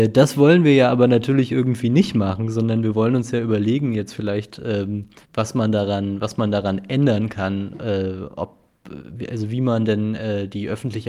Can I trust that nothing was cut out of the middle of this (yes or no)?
no